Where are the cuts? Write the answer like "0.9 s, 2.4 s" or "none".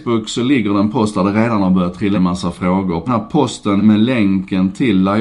2.1 s, 3.1 s, 3.8 s